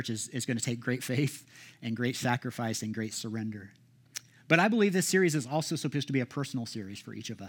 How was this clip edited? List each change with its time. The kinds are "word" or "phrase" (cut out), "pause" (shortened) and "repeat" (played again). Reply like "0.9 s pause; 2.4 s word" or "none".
none